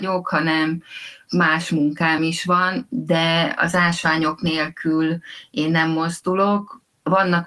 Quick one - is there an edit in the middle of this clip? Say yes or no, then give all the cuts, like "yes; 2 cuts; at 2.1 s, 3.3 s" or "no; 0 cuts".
no; 0 cuts